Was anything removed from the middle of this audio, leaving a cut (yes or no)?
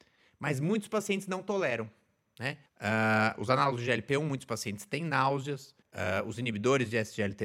yes